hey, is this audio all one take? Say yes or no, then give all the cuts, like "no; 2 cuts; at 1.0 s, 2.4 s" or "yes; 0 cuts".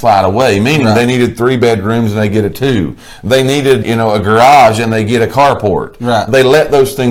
no; 1 cut; at 3.8 s